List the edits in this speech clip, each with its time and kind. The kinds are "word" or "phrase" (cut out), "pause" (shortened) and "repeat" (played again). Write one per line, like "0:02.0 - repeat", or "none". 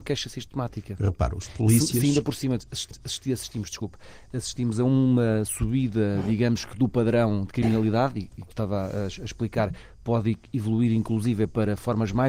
0:02.9 - repeat
0:08.5 - phrase